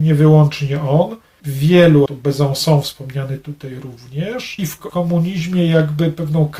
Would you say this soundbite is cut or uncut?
cut